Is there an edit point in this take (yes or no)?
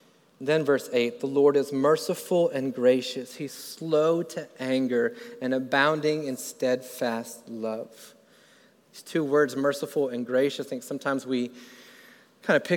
no